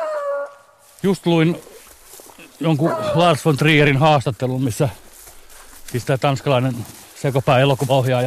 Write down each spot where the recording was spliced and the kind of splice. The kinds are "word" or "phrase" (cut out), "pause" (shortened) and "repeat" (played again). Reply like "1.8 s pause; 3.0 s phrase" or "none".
none